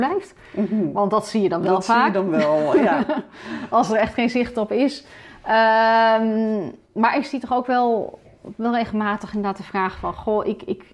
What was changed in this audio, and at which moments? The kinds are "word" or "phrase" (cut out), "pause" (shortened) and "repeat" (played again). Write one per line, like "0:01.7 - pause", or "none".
0:06.8 - pause